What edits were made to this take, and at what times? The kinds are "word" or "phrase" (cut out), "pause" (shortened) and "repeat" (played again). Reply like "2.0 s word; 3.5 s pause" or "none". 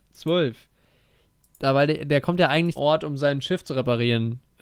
2.8 s word